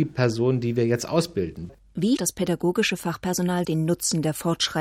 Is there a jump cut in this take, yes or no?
yes